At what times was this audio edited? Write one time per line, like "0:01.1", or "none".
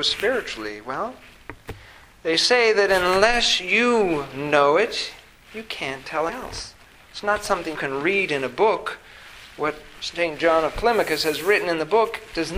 0:06.3
0:07.7